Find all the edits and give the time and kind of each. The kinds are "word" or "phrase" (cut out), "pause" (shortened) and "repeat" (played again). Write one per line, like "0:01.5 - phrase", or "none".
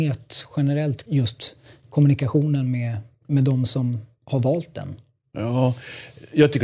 0:01.1 - word